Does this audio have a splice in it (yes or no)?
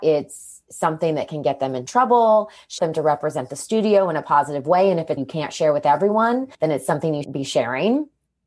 yes